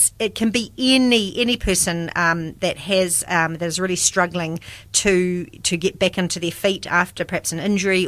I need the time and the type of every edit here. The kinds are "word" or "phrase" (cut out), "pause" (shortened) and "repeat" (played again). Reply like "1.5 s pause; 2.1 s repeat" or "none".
none

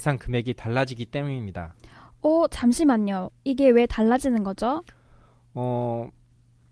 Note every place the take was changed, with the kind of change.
none

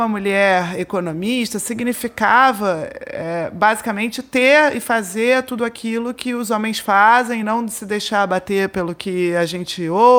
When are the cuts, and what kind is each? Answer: none

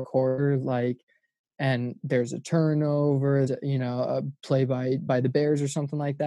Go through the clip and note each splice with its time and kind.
3.5 s word; 4.4 s word; 5.1 s word

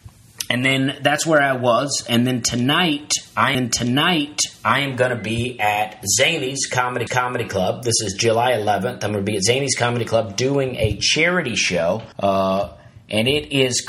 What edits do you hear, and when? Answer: 3.5 s repeat; 7.1 s repeat; 12.1 s pause

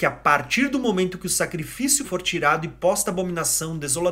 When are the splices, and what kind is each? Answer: 2.0 s word

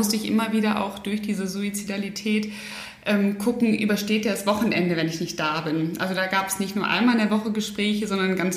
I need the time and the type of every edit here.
none

